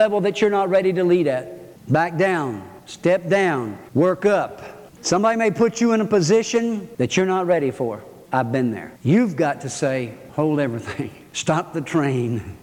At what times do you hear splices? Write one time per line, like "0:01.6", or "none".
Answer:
0:03.8
0:09.0